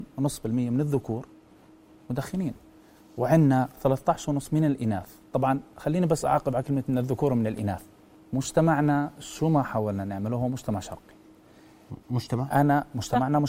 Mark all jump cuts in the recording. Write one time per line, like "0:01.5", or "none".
none